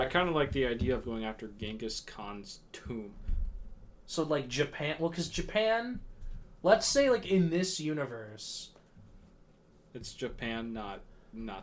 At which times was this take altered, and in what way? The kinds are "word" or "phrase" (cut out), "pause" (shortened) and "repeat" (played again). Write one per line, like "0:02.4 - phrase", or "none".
0:01.0 - word